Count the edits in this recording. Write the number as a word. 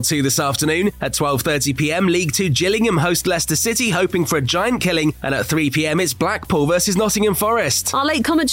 zero